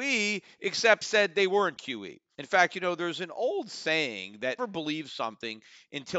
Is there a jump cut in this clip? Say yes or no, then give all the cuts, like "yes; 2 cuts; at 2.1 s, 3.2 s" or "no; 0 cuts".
yes; 3 cuts; at 1.0 s, 1.8 s, 4.6 s